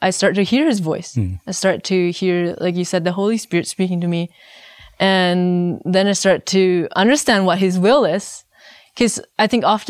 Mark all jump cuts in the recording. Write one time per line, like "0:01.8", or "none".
none